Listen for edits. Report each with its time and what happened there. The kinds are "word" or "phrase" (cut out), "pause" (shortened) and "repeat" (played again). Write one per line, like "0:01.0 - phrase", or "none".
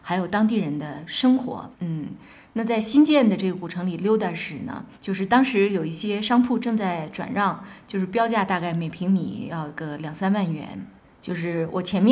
0:01.7 - pause
0:04.9 - pause
0:11.0 - pause